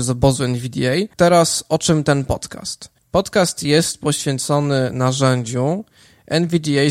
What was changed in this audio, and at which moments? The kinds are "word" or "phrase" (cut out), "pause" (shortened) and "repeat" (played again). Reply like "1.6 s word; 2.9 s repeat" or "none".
1.1 s pause